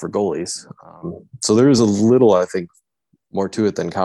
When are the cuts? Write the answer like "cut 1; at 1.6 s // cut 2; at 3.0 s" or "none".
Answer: none